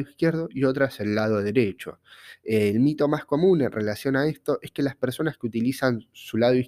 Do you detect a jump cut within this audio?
no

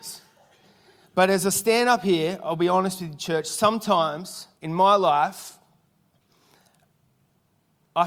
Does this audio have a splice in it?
yes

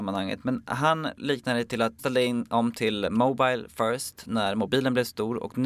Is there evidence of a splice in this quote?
yes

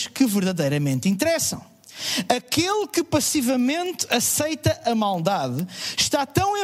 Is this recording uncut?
yes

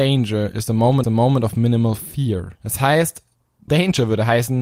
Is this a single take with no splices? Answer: no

